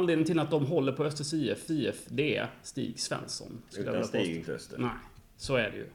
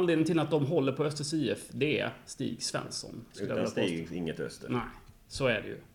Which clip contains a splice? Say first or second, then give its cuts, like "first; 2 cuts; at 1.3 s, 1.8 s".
first; 2 cuts; at 1.7 s, 4.4 s